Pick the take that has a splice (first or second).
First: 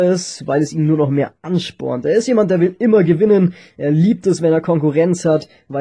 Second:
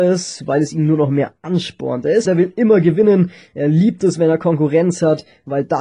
second